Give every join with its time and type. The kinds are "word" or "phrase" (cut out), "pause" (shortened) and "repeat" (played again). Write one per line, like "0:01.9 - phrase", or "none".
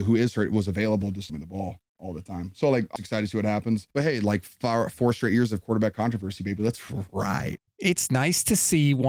0:01.3 - phrase
0:03.0 - word
0:03.9 - pause